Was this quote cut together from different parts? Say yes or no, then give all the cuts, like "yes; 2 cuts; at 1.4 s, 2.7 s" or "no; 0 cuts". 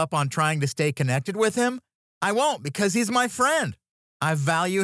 no; 0 cuts